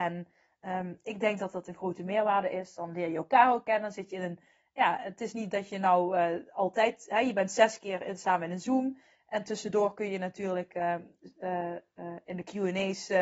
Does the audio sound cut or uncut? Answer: uncut